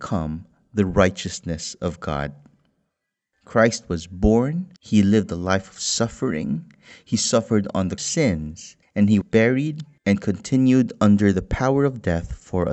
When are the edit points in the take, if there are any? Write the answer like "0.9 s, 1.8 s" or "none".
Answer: 4.8 s, 8.0 s, 8.8 s, 9.2 s, 10.0 s